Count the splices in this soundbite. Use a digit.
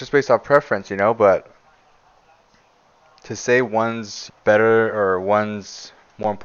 1